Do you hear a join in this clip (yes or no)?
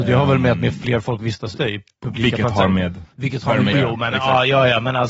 yes